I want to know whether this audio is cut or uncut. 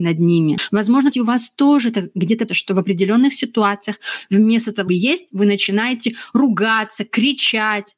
cut